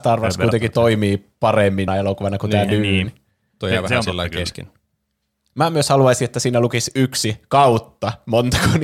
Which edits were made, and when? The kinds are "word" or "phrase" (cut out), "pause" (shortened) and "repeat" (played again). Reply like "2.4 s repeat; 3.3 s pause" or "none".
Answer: 1.9 s word